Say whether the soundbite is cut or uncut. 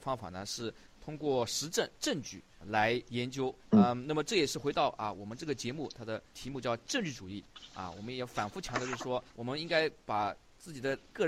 cut